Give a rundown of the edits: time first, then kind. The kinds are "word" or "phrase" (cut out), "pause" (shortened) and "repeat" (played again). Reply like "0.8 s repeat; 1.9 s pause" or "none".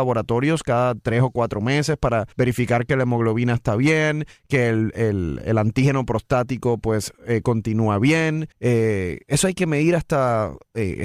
2.3 s pause; 8.5 s pause

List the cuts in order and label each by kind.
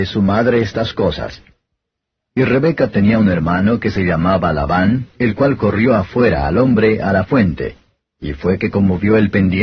none

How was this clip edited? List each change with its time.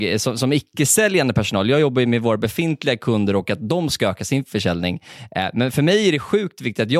none

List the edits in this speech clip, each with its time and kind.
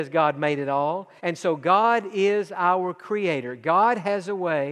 1.2 s pause

